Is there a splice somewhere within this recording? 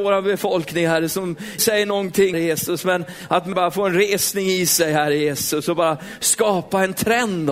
yes; 3 cuts; at 1.6 s, 2.3 s, 3.5 s

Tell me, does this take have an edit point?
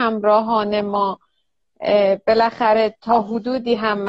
no; 0 cuts

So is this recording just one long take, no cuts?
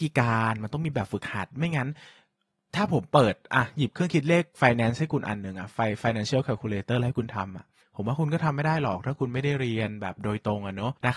yes; 0 cuts

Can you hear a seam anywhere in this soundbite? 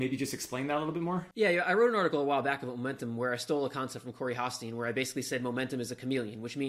no; 0 cuts

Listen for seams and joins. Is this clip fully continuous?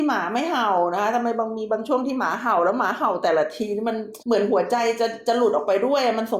no; 1 cut; at 4.2 s

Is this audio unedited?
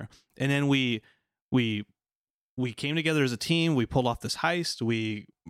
yes; 0 cuts

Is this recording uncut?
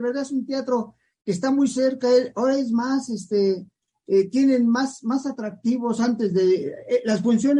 yes; 0 cuts

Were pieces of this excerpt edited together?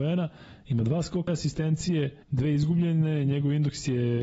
yes; 2 cuts; at 1.3 s, 2.2 s

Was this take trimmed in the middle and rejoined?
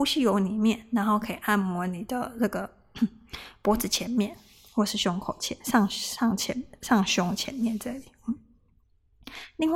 no; 0 cuts

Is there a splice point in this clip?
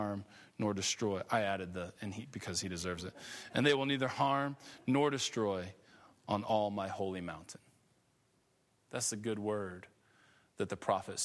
no; 0 cuts

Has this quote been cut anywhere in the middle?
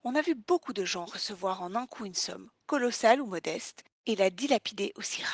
yes; 1 cut; at 3.9 s

